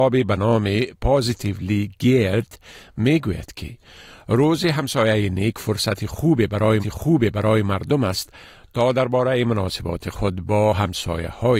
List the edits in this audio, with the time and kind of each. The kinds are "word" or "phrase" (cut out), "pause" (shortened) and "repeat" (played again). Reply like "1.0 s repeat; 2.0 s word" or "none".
6.8 s repeat